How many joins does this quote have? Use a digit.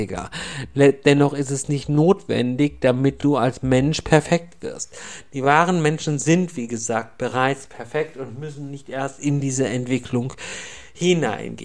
0